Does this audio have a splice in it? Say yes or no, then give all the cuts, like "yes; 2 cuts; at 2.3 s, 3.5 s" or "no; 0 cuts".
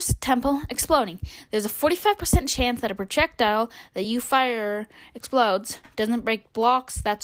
no; 0 cuts